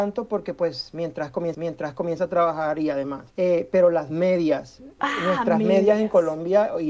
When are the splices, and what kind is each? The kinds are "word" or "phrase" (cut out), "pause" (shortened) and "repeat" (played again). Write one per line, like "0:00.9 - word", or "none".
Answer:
0:01.5 - repeat
0:03.3 - pause
0:05.0 - word